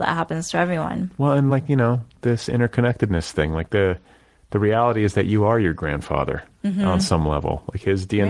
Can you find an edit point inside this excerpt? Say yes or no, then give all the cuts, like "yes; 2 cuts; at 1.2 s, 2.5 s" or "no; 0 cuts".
no; 0 cuts